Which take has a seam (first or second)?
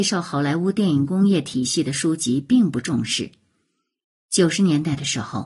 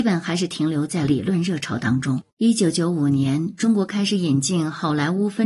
second